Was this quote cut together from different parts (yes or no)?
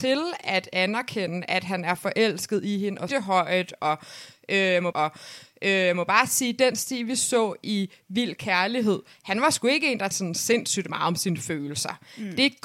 yes